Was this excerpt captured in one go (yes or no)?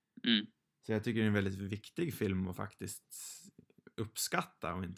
yes